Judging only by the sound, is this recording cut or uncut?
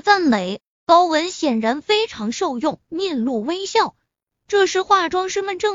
uncut